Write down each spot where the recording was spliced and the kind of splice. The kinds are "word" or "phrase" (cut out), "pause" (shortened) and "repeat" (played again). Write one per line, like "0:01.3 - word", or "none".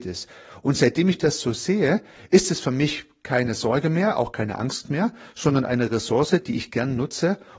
none